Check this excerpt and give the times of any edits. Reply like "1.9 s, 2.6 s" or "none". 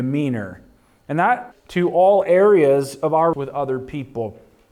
1.5 s, 3.3 s